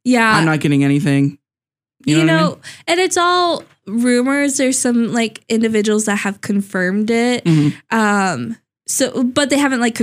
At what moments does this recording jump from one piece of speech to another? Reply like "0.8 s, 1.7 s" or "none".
none